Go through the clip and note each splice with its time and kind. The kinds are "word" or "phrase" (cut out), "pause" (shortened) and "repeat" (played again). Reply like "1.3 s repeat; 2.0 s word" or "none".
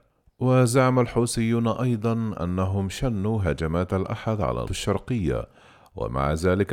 4.6 s word

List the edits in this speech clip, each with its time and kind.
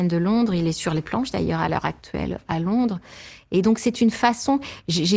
none

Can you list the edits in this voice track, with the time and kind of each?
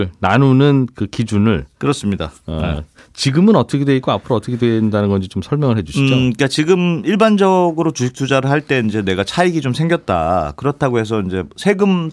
none

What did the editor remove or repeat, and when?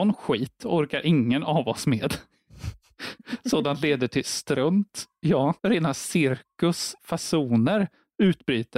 5.6 s pause

